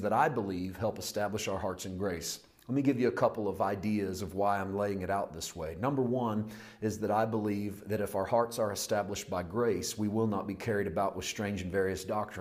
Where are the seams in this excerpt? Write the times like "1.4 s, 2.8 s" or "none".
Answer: none